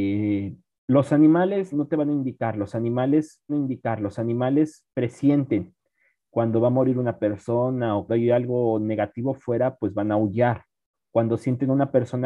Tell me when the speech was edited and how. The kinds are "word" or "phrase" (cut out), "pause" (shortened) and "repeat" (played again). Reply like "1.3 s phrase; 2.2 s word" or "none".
1.7 s word; 3.5 s repeat; 8.1 s word; 10.9 s pause